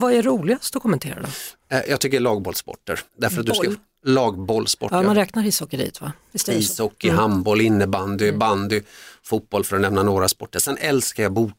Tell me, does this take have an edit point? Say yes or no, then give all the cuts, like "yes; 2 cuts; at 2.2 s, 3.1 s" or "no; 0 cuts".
yes; 1 cut; at 3.1 s